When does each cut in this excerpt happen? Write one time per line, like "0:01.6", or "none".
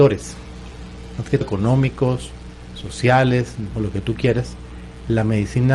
0:01.4
0:03.7